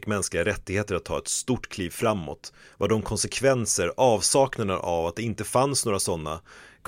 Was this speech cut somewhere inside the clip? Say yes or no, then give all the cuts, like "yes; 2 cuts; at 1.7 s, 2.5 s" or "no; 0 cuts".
no; 0 cuts